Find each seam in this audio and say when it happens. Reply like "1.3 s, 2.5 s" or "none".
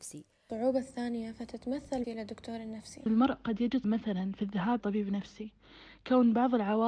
2.0 s, 3.1 s, 3.8 s, 4.8 s